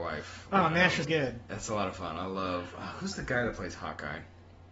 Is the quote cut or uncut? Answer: cut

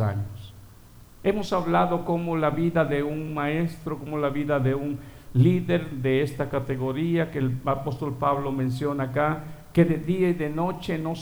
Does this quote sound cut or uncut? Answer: uncut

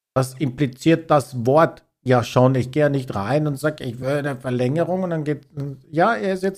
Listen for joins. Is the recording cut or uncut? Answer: uncut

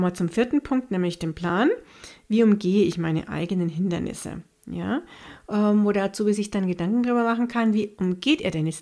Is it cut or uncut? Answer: uncut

